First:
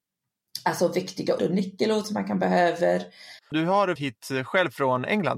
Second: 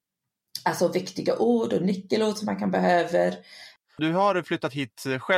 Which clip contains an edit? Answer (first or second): first